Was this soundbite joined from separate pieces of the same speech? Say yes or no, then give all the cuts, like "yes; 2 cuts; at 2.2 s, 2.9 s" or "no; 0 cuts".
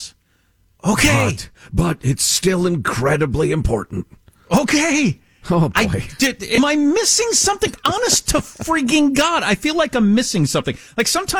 no; 0 cuts